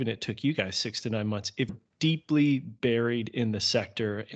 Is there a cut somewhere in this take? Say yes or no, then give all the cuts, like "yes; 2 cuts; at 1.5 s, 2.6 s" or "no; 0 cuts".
yes; 1 cut; at 1.7 s